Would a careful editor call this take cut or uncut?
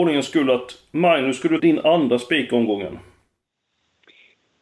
cut